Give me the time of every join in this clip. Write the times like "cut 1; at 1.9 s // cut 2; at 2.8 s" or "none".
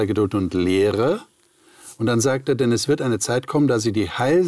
none

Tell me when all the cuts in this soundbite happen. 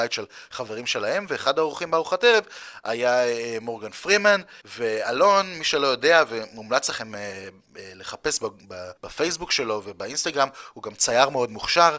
cut 1; at 4.6 s // cut 2; at 9.0 s

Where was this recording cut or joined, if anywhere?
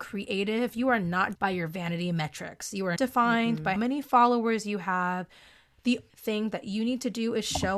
cut 1; at 1.3 s // cut 2; at 3.0 s // cut 3; at 3.8 s // cut 4; at 6.1 s

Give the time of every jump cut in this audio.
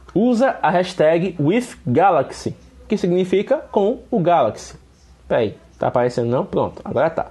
none

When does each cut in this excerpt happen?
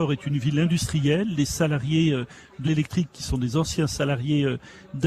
cut 1; at 2.6 s

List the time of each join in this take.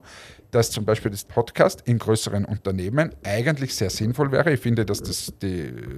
cut 1; at 1.2 s

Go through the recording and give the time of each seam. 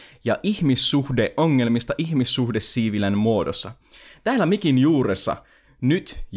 none

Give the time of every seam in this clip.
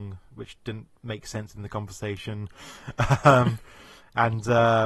none

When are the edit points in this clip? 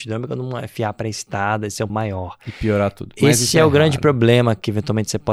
cut 1; at 1.9 s

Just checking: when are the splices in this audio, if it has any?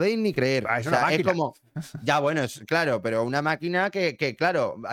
none

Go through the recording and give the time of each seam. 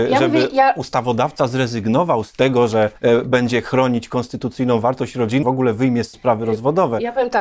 cut 1; at 3.0 s // cut 2; at 5.4 s // cut 3; at 6.1 s

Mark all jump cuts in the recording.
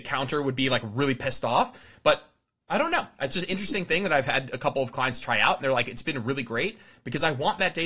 none

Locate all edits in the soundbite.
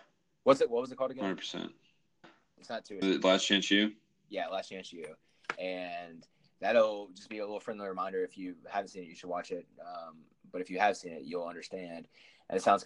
cut 1; at 2.2 s // cut 2; at 3.0 s

